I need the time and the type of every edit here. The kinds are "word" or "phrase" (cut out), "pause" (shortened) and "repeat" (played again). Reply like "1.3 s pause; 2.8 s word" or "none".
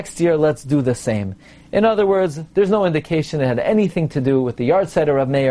none